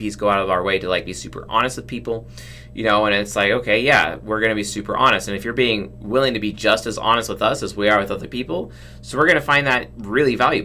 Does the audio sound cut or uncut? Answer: uncut